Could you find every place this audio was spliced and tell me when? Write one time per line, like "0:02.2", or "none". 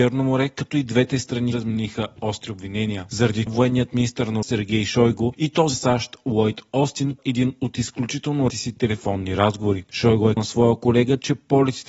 0:01.5
0:03.5
0:04.4
0:05.7
0:07.2
0:08.5
0:10.4